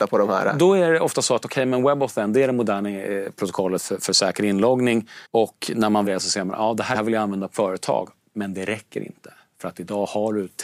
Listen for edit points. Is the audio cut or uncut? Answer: cut